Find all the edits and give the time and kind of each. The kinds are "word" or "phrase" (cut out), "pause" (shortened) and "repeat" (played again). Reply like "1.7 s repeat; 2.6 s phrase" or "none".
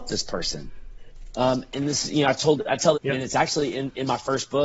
1.7 s word; 2.9 s phrase